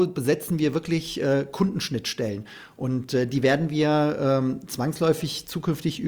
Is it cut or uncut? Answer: uncut